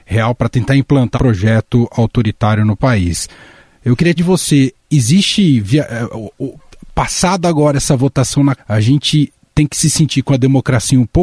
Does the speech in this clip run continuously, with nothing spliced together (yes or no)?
no